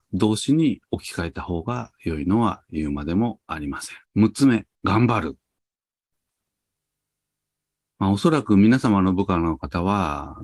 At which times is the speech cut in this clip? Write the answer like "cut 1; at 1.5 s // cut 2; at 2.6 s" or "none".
cut 1; at 4.0 s // cut 2; at 4.7 s